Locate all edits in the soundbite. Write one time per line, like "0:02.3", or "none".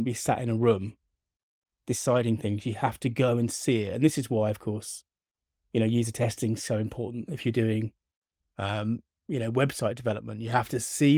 none